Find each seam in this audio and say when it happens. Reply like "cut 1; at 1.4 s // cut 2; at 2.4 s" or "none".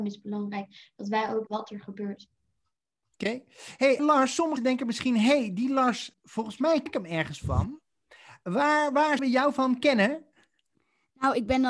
cut 1; at 1.5 s // cut 2; at 4.0 s // cut 3; at 4.6 s // cut 4; at 6.1 s // cut 5; at 6.9 s // cut 6; at 9.2 s // cut 7; at 9.8 s